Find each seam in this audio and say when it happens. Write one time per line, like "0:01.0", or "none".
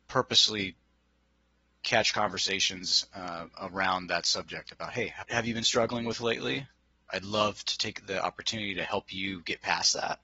0:05.2